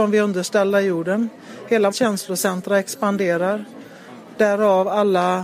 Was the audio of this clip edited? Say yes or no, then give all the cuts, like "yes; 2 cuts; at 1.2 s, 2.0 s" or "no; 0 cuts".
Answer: yes; 1 cut; at 1.9 s